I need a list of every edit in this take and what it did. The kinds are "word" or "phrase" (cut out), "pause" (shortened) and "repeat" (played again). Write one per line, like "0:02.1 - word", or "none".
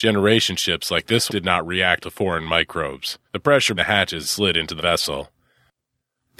0:01.3 - word
0:02.0 - word
0:03.3 - pause
0:03.8 - word
0:04.2 - phrase
0:04.8 - word